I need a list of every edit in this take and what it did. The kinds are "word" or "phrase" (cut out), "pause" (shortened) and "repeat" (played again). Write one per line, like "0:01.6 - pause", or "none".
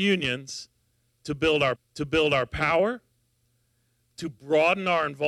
0:01.8 - repeat